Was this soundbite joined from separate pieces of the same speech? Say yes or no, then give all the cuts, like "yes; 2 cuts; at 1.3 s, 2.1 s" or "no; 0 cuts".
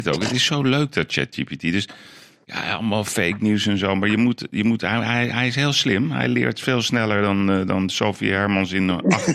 no; 0 cuts